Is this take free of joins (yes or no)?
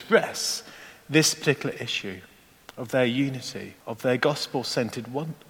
no